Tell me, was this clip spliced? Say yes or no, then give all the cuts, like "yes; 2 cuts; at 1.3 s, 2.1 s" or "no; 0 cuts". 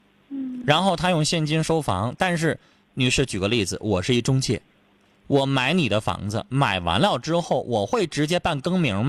no; 0 cuts